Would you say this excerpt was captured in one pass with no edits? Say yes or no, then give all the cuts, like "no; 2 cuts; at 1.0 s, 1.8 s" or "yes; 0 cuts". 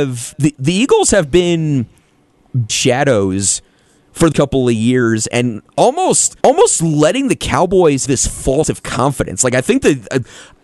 no; 6 cuts; at 2.7 s, 4.3 s, 5.3 s, 6.4 s, 8.1 s, 8.6 s